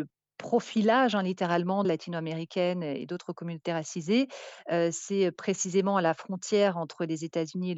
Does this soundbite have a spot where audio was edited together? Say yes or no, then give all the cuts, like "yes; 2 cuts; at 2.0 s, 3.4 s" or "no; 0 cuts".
yes; 1 cut; at 1.8 s